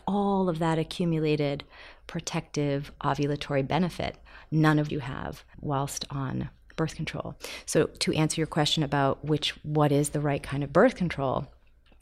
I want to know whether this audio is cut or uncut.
cut